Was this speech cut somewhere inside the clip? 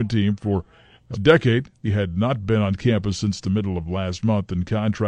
yes; 2 cuts; at 1.1 s, 1.8 s

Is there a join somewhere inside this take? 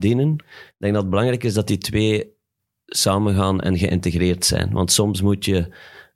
no; 0 cuts

